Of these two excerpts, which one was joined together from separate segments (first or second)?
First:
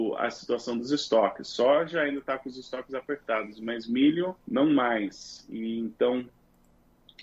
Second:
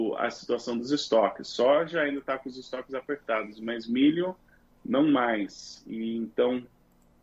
first